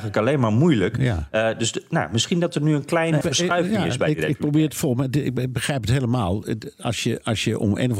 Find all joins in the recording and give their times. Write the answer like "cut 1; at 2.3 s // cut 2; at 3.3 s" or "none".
cut 1; at 3.2 s